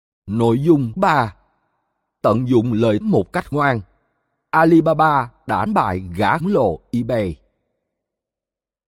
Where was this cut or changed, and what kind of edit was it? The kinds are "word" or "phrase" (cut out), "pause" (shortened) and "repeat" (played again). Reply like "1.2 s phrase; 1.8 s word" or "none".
1.0 s word; 2.2 s word; 3.0 s word; 3.5 s word; 5.7 s word; 6.4 s word